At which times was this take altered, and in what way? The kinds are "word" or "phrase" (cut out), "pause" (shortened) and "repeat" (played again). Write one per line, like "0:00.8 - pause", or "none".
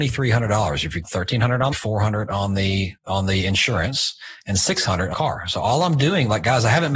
0:01.0 - phrase
0:01.7 - phrase
0:03.0 - pause
0:05.1 - word